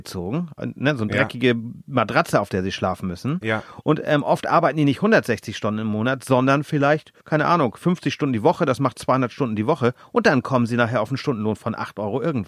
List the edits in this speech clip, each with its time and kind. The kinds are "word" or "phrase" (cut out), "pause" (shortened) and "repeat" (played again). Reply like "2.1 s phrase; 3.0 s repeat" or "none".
7.2 s pause